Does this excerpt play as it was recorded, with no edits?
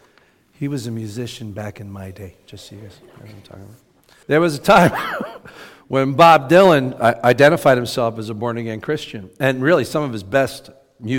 no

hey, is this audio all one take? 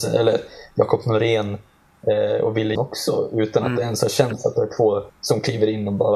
no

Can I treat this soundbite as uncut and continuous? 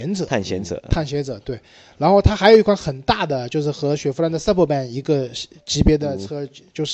yes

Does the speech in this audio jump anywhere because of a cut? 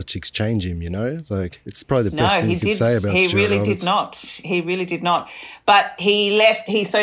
no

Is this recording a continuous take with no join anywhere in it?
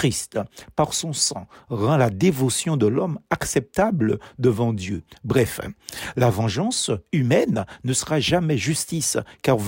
yes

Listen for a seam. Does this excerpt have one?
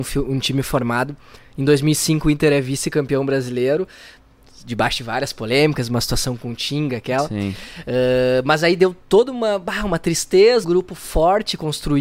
yes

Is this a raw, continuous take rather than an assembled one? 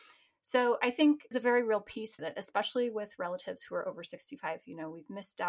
no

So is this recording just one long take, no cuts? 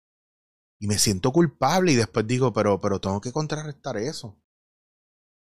yes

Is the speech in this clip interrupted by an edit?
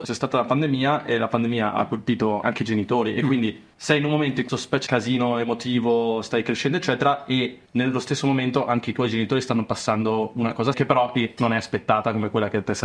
yes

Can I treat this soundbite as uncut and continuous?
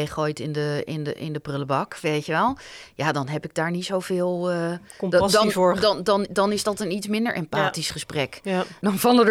yes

